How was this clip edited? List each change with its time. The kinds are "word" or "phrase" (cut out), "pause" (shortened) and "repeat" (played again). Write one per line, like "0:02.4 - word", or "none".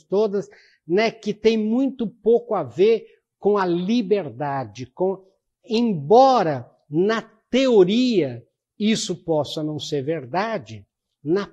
none